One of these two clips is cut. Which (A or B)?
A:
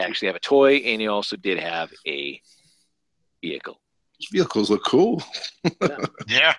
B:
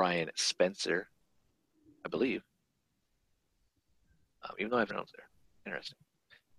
B